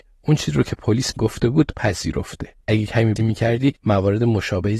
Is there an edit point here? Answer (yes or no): yes